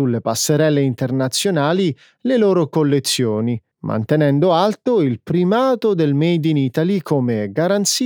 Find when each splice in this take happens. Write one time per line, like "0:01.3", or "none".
0:03.7